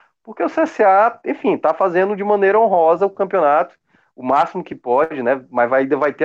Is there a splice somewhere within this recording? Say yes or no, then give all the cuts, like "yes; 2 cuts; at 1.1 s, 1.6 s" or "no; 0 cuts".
no; 0 cuts